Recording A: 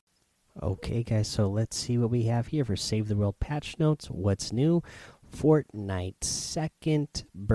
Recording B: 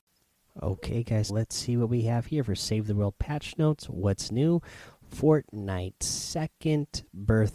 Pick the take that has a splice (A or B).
B